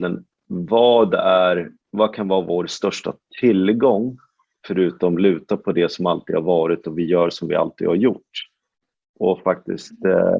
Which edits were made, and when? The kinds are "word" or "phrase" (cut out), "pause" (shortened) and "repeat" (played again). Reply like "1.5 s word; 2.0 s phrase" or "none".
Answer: 1.8 s pause